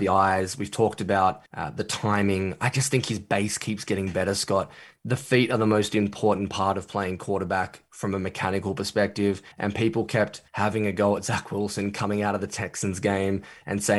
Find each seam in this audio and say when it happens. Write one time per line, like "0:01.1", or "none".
0:01.5
0:09.5
0:10.5